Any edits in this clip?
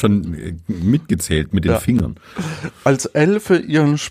no; 0 cuts

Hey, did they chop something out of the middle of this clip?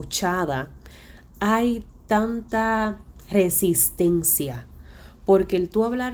no; 0 cuts

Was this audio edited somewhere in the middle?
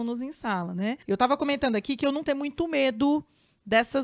yes; 2 cuts; at 1.0 s, 2.2 s

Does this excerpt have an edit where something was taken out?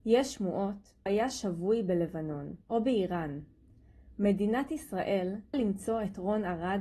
yes; 3 cuts; at 1.1 s, 2.6 s, 5.5 s

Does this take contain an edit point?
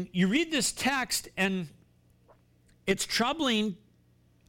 no; 0 cuts

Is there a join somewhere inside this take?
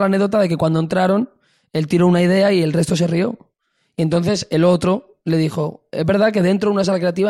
no; 0 cuts

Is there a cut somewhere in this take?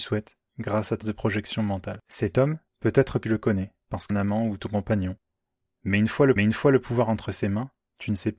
yes; 7 cuts; at 1.0 s, 2.0 s, 2.7 s, 3.2 s, 3.8 s, 4.1 s, 6.4 s

